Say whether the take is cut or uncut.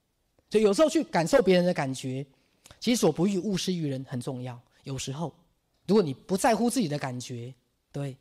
uncut